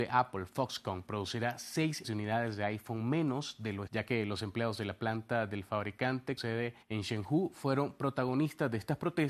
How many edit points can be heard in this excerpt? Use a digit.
4